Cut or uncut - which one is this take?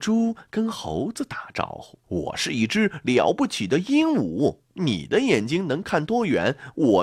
cut